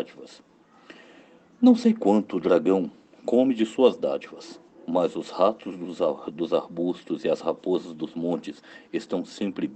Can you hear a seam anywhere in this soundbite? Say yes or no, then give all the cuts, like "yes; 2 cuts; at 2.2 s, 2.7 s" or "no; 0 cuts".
no; 0 cuts